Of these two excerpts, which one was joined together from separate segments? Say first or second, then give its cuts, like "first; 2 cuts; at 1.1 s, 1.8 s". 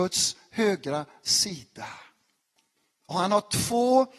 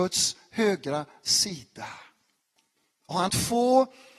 second; 1 cut; at 3.3 s